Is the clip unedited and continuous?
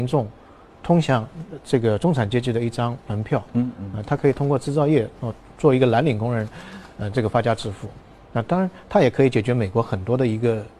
yes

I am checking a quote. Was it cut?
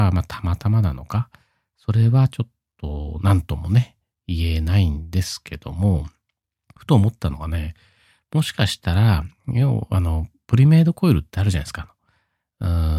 no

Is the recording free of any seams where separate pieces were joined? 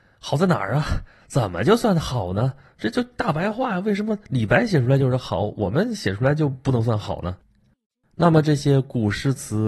yes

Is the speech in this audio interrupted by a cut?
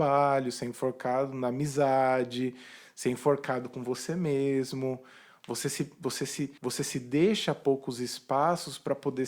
yes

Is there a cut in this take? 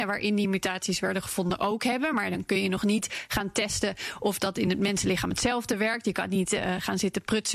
no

